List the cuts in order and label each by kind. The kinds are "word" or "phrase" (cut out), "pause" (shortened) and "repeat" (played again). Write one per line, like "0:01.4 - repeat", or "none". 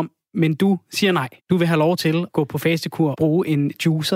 0:01.4 - pause
0:02.3 - word
0:03.1 - word